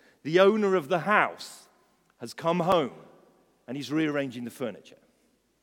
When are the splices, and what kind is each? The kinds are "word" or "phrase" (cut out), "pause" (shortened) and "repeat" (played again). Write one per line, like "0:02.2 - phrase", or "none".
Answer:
none